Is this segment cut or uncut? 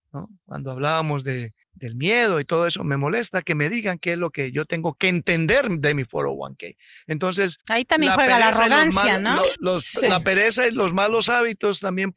cut